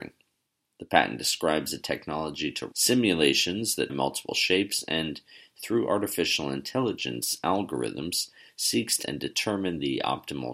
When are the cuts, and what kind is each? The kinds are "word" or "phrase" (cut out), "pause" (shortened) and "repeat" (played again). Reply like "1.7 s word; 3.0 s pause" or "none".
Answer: 2.7 s word; 3.9 s word; 9.0 s word

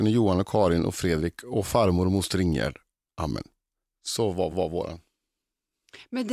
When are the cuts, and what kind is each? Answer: 4.5 s repeat

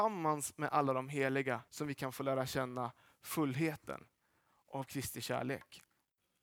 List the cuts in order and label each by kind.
1.7 s pause

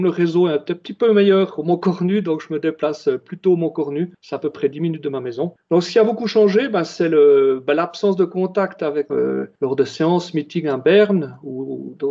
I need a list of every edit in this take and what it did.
9.1 s phrase

